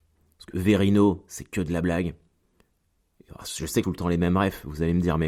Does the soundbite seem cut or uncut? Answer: cut